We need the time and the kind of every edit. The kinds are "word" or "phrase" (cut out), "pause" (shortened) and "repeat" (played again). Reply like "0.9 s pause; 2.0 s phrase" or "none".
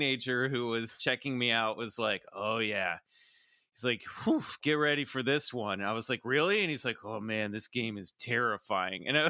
none